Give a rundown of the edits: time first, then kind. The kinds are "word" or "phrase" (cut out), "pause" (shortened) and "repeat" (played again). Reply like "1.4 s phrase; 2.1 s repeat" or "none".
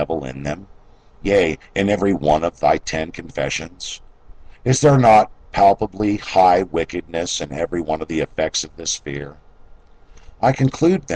none